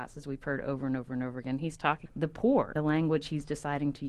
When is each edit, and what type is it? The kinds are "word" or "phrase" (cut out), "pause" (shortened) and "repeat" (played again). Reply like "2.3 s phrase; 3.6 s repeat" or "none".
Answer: 2.1 s word; 2.8 s word

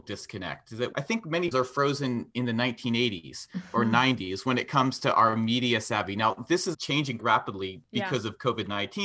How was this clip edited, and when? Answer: 0.9 s word; 1.5 s word; 6.7 s word; 7.2 s word

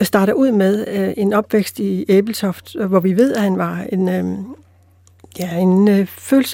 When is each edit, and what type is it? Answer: none

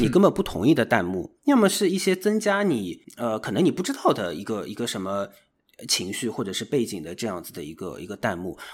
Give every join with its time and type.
1.4 s pause

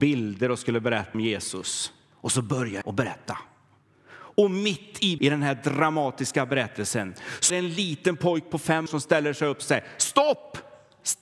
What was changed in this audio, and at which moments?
1.1 s word; 2.8 s word; 5.2 s word; 7.5 s word; 8.9 s word

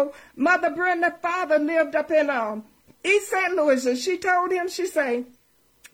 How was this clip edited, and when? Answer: none

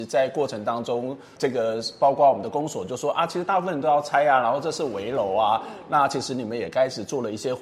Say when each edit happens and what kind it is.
1.4 s word

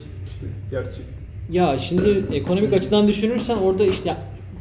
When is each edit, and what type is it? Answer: none

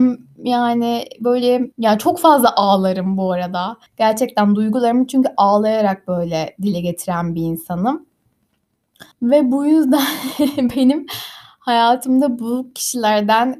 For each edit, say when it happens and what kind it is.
1.7 s pause; 3.9 s pause; 9.1 s pause

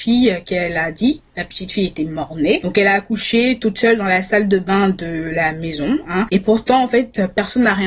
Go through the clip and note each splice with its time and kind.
none

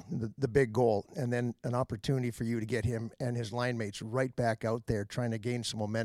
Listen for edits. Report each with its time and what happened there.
none

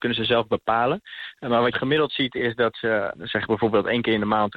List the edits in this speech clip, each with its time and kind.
1.7 s word; 3.1 s word

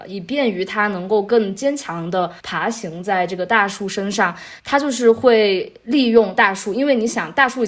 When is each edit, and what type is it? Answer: 2.4 s pause; 4.6 s pause

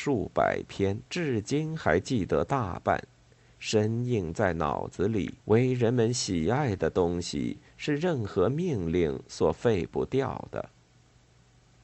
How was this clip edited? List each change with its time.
1.1 s pause; 5.4 s pause

